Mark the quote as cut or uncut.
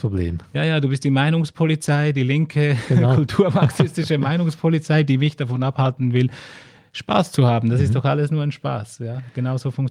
uncut